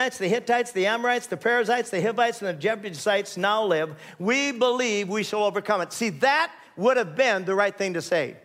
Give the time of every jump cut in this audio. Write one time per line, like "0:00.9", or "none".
none

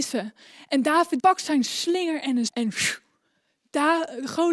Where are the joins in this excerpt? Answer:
0:01.2
0:02.5

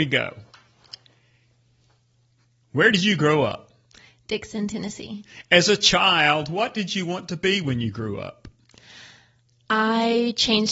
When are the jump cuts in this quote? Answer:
none

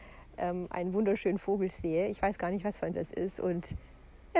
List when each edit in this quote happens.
0:02.9

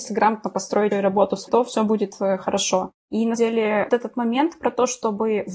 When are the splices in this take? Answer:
0:00.9
0:01.5
0:03.4
0:03.9

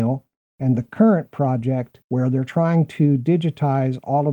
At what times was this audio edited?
none

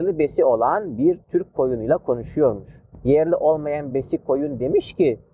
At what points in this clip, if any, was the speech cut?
none

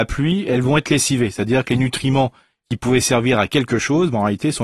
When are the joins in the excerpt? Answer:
none

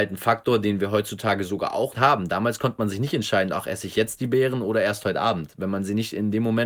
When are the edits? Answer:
0:01.9

